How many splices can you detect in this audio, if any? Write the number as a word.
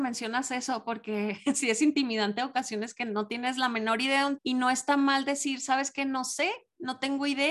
one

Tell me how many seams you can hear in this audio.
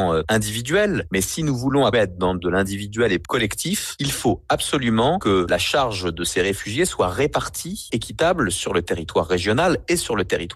three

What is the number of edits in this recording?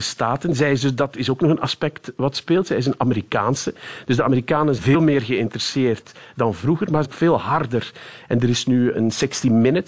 three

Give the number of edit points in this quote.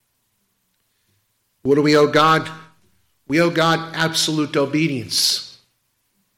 zero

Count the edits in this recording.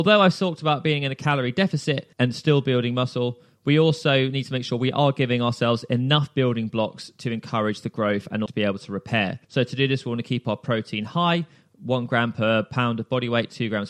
three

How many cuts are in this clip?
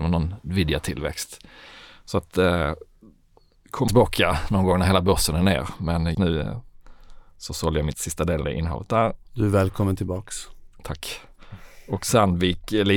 four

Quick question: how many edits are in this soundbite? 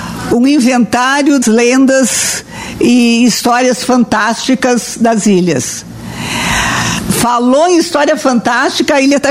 one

